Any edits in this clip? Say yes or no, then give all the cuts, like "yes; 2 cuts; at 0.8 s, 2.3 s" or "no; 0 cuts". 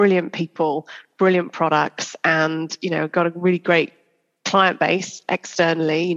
no; 0 cuts